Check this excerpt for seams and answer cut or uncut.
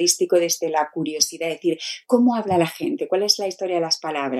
uncut